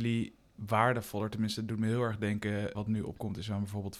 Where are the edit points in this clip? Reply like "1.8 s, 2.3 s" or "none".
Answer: 2.7 s